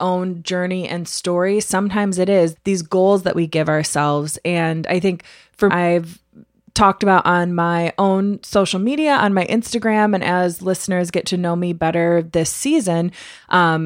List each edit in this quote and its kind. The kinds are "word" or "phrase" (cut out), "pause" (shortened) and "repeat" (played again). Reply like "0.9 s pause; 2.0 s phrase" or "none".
2.6 s word; 5.7 s phrase